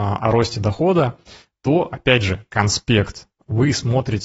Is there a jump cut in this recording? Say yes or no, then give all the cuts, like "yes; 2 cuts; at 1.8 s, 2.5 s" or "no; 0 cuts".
no; 0 cuts